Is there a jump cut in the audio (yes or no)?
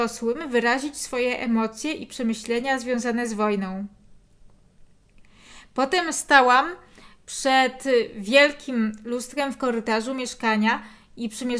no